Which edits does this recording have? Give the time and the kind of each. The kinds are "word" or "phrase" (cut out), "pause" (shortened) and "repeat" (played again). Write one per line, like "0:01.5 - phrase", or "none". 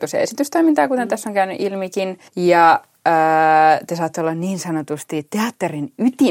0:02.3 - pause